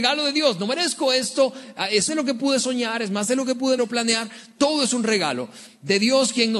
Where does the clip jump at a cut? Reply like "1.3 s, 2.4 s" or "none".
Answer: 2.1 s, 3.8 s